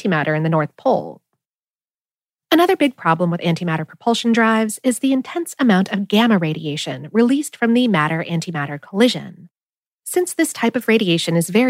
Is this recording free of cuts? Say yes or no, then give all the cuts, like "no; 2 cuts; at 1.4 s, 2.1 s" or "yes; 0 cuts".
yes; 0 cuts